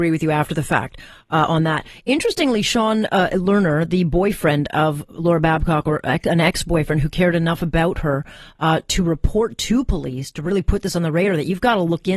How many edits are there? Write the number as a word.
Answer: zero